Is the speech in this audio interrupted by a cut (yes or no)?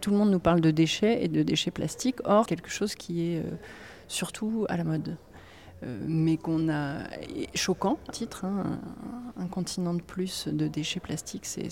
yes